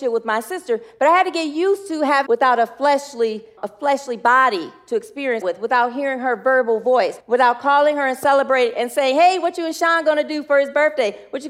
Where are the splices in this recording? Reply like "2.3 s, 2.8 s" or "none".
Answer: 2.3 s, 3.6 s, 5.4 s, 7.2 s